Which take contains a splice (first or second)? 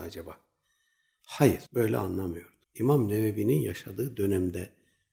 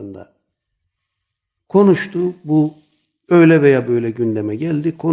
first